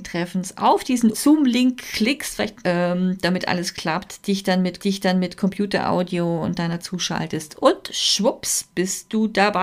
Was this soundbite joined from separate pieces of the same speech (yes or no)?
yes